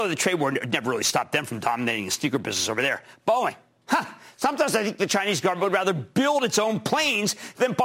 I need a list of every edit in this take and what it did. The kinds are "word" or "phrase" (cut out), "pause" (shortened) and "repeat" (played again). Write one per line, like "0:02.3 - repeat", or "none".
none